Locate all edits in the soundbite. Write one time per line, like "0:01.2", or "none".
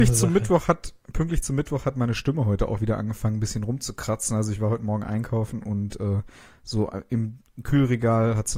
none

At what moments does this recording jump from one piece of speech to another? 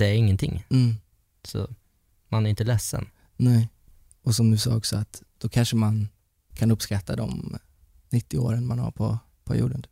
none

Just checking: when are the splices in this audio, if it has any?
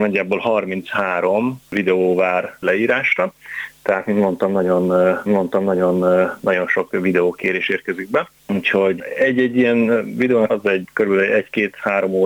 0:05.3
0:10.5

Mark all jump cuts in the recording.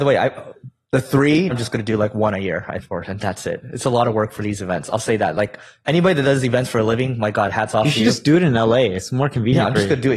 0:01.5
0:02.8

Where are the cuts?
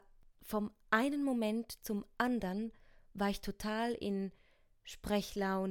none

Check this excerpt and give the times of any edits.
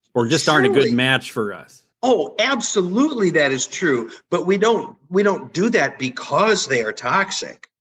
0:01.9

